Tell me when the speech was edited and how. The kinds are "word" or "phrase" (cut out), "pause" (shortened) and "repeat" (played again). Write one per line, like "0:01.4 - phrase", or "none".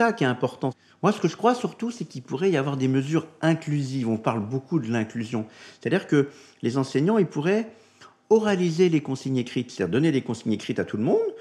none